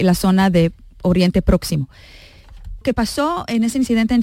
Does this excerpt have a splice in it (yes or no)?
yes